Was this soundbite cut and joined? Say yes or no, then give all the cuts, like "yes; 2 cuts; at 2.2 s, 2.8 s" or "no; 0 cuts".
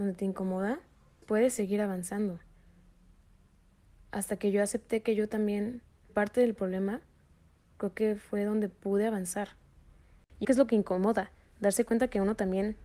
yes; 3 cuts; at 1.2 s, 6.1 s, 10.4 s